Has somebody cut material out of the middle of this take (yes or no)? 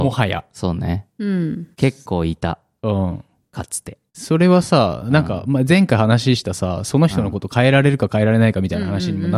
yes